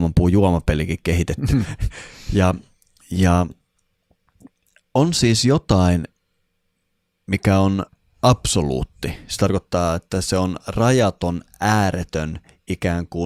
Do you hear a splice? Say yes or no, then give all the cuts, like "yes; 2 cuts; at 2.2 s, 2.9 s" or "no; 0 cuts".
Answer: no; 0 cuts